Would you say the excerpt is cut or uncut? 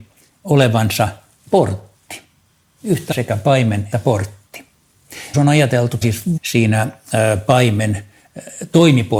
cut